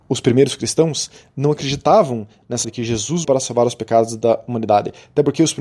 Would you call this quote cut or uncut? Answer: cut